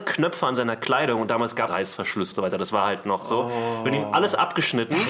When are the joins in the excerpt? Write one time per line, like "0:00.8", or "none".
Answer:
0:01.7
0:02.3